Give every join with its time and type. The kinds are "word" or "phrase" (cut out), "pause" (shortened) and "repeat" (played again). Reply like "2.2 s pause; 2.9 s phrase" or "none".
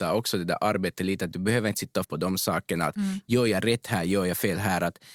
2.0 s word